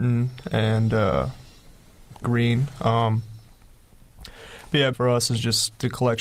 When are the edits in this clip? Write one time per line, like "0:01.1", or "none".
0:02.2
0:04.9